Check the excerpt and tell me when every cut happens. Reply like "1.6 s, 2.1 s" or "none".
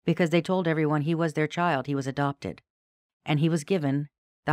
none